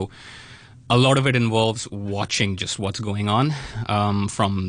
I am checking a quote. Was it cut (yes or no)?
no